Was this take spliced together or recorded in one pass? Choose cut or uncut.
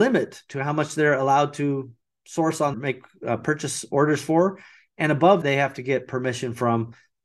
cut